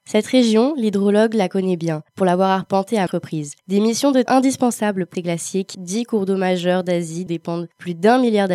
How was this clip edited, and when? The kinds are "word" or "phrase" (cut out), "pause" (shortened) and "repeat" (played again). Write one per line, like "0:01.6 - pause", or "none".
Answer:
0:02.1 - pause
0:03.1 - word
0:03.6 - pause
0:04.3 - word
0:05.1 - phrase
0:05.7 - word
0:07.3 - word